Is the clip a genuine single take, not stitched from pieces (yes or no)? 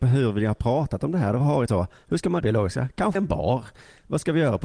no